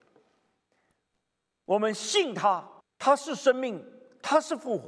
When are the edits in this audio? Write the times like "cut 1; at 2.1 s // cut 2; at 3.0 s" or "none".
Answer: cut 1; at 2.8 s

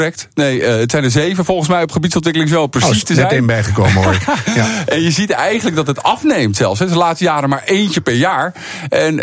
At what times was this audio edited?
none

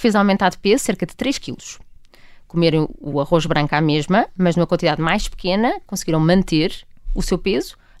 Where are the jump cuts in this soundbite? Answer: none

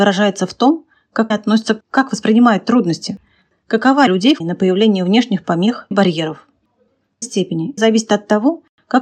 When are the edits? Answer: cut 1; at 1.3 s // cut 2; at 1.8 s // cut 3; at 4.1 s // cut 4; at 4.4 s // cut 5; at 5.9 s // cut 6; at 7.2 s // cut 7; at 7.8 s

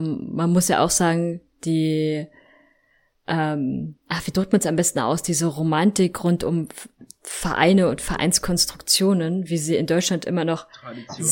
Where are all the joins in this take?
cut 1; at 4.0 s

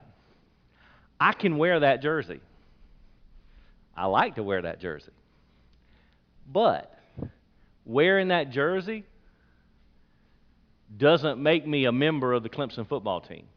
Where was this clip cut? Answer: none

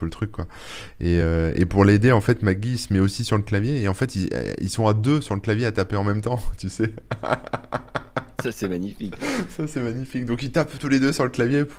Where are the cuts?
none

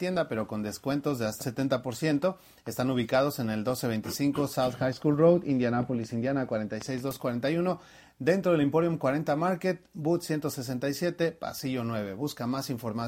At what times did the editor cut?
cut 1; at 1.4 s

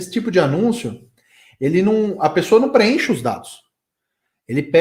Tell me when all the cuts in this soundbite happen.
none

